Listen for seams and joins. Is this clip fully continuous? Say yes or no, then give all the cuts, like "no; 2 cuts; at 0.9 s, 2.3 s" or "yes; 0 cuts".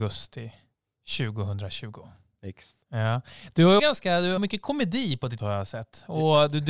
no; 4 cuts; at 2.8 s, 3.8 s, 4.4 s, 5.4 s